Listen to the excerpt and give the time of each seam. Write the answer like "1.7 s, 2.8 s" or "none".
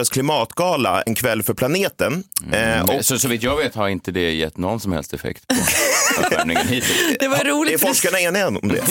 1.1 s